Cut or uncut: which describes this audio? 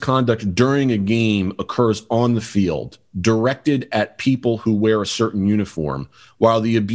uncut